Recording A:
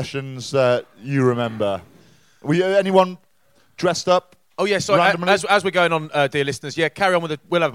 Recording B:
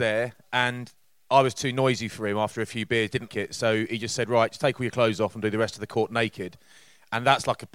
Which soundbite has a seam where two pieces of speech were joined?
B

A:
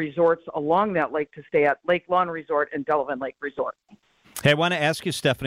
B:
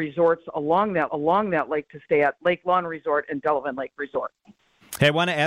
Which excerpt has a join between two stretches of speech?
B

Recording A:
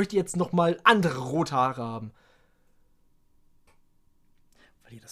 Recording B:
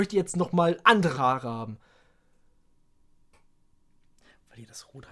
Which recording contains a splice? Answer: B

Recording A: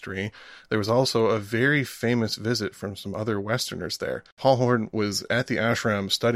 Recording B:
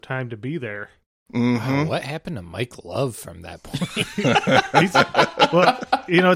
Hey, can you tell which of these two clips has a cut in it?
A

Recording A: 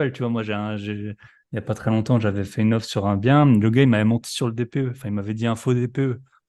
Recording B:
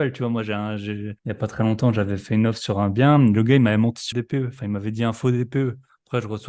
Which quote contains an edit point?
B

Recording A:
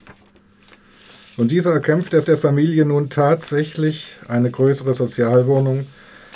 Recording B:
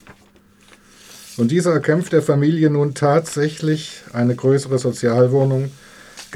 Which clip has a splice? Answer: A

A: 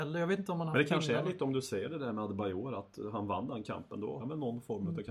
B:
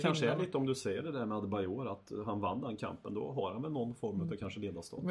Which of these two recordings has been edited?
A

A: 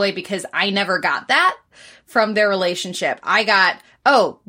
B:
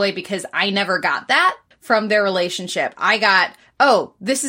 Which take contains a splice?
B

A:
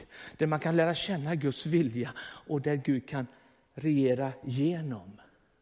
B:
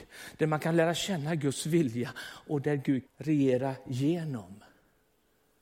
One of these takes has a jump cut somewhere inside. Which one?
B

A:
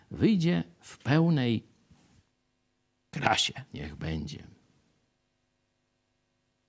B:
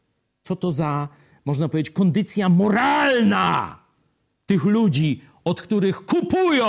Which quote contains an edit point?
A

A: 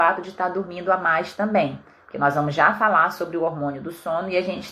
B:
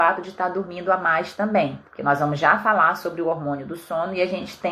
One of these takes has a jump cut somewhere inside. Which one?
B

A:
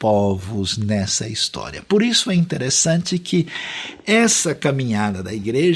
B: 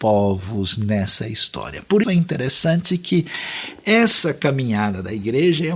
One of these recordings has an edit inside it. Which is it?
B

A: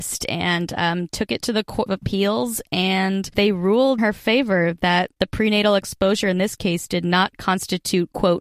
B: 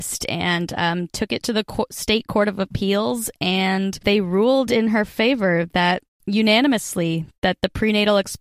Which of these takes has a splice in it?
A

